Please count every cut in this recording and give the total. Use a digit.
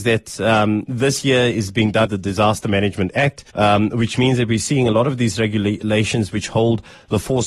2